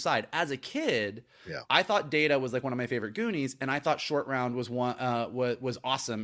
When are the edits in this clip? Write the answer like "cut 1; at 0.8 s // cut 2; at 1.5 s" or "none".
none